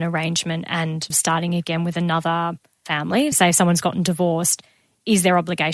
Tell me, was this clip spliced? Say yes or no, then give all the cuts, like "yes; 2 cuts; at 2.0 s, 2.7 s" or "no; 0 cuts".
yes; 2 cuts; at 1.1 s, 3.3 s